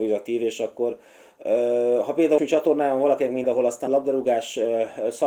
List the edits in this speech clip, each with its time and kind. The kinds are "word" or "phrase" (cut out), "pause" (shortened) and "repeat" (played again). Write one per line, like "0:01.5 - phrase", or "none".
0:02.4 - word
0:03.4 - word
0:03.9 - word